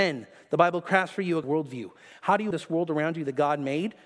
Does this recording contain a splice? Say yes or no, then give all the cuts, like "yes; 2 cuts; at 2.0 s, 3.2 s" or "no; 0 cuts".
yes; 2 cuts; at 1.4 s, 2.5 s